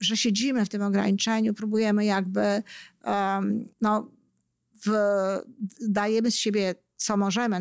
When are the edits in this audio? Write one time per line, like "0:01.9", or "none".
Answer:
0:03.7